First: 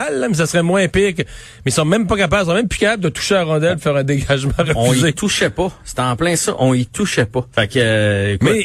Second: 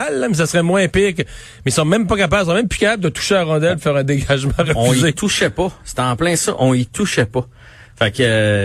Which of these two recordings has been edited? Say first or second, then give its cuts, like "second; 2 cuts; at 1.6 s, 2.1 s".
first; 1 cut; at 7.5 s